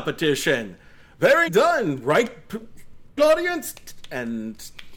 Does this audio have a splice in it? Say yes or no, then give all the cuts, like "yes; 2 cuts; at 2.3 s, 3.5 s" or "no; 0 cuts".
yes; 2 cuts; at 1.5 s, 3.2 s